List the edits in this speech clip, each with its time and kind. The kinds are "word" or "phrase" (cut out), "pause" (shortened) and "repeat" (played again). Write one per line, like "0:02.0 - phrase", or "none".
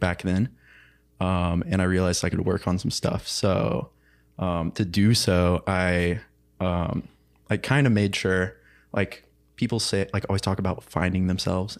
0:02.3 - phrase